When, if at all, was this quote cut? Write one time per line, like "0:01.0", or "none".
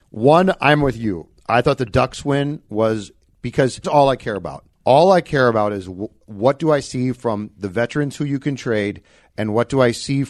0:01.4
0:03.8
0:04.7